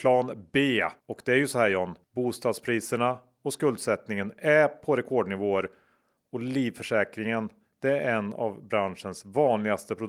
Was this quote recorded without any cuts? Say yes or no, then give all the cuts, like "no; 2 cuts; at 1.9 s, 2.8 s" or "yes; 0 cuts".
no; 2 cuts; at 1.0 s, 2.0 s